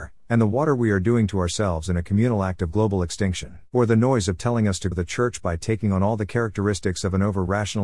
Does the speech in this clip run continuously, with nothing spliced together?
no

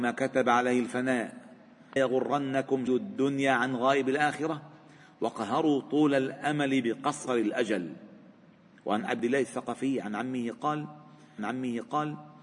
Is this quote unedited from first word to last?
no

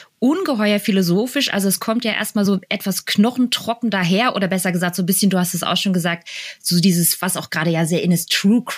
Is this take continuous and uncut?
yes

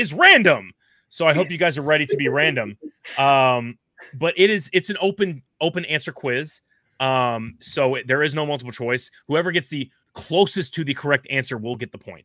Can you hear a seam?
yes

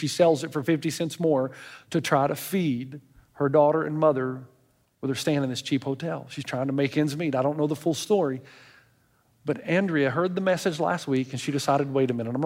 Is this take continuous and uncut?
yes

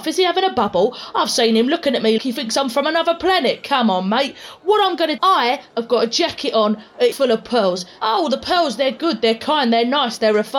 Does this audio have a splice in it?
yes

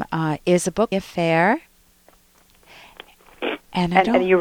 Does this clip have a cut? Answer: yes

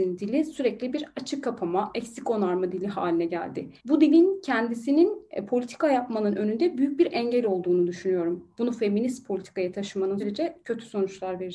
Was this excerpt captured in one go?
no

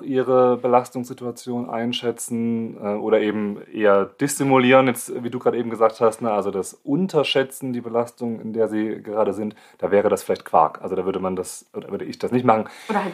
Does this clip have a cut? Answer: no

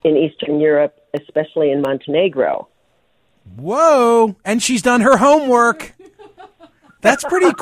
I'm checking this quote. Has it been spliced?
no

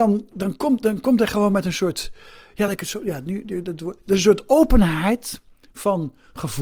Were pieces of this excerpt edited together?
no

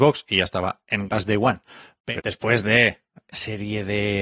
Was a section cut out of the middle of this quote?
yes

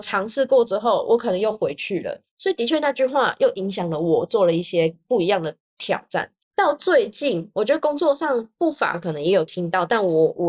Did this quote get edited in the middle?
yes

